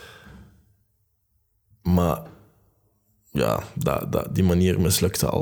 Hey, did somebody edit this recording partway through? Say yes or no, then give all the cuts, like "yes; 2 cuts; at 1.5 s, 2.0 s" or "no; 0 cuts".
no; 0 cuts